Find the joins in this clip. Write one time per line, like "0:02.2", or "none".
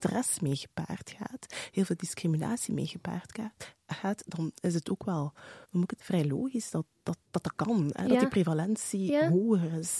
0:05.6
0:06.0
0:07.2